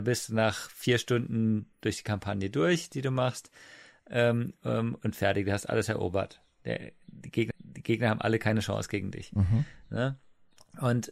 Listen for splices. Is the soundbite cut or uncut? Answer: cut